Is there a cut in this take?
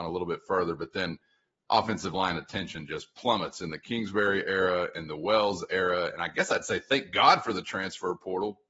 no; 0 cuts

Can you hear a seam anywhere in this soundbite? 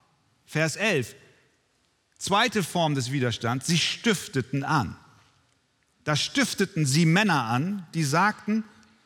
no; 0 cuts

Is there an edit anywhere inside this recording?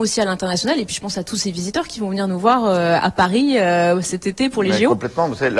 no; 0 cuts

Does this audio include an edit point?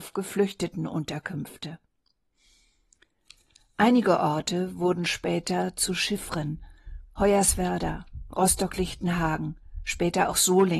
no; 0 cuts

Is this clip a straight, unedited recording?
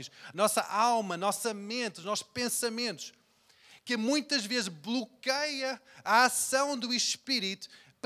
yes; 0 cuts

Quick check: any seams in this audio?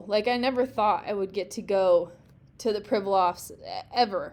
no; 0 cuts

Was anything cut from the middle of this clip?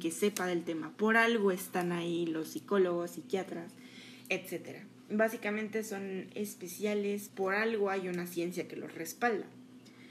yes; 1 cut; at 7.3 s

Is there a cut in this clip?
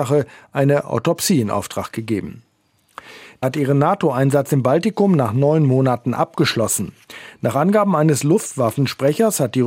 yes; 1 cut; at 3.4 s

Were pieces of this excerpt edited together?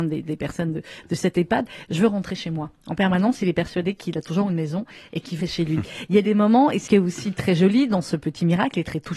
yes; 2 cuts; at 5.4 s, 6.9 s

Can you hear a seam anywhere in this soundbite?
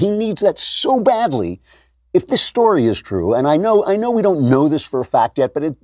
no; 0 cuts

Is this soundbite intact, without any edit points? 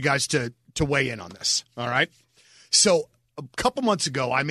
yes; 0 cuts

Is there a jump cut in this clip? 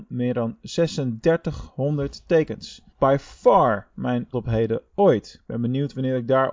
yes; 2 cuts; at 2.9 s, 4.3 s

